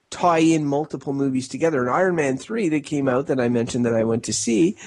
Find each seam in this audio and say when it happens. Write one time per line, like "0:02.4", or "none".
none